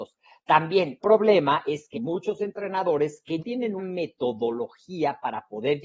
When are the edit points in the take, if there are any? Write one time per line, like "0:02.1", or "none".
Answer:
0:01.0
0:01.9
0:03.4
0:03.8